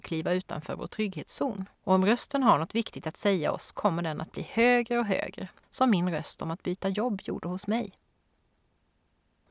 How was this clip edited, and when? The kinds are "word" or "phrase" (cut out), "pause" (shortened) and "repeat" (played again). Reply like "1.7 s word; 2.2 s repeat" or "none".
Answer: 1.8 s pause; 5.6 s pause